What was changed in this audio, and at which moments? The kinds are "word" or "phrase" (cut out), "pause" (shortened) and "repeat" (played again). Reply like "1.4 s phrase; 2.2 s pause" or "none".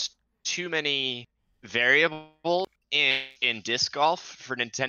3.4 s word